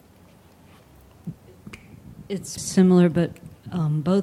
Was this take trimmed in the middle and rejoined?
yes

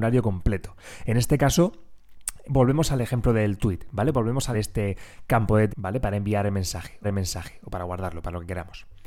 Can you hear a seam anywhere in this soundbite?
yes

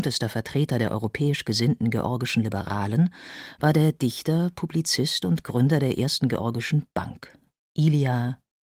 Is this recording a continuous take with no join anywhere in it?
yes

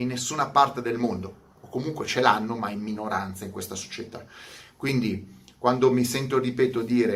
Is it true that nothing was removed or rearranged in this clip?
yes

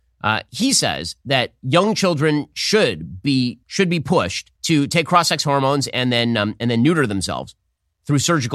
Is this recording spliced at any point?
yes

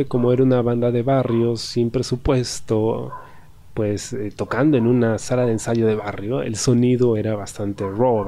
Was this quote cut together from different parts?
no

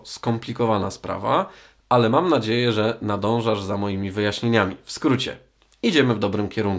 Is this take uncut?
yes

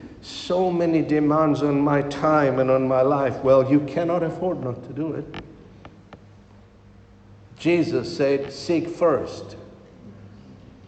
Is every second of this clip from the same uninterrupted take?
yes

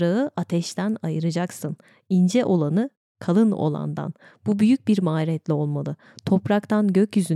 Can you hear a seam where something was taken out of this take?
no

